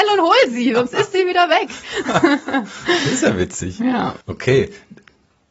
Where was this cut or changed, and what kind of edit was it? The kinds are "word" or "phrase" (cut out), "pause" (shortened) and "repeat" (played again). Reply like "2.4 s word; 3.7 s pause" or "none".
4.2 s pause